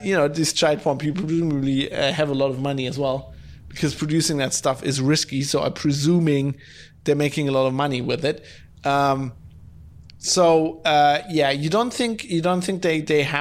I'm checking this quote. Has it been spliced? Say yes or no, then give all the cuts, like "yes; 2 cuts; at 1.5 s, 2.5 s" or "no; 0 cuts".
no; 0 cuts